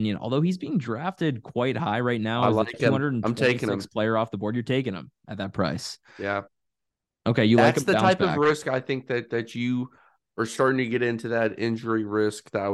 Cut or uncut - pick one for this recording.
uncut